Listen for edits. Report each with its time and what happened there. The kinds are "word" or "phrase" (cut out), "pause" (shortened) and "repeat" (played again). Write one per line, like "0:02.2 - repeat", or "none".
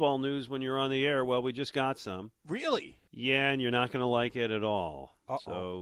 0:03.1 - pause